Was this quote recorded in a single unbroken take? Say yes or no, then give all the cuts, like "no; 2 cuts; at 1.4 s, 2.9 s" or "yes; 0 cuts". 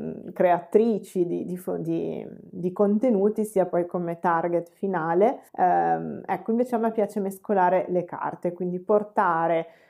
no; 1 cut; at 5.5 s